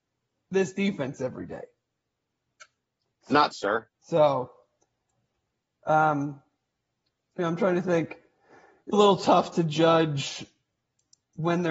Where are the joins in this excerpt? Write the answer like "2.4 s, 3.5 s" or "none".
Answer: 3.5 s, 3.9 s, 8.9 s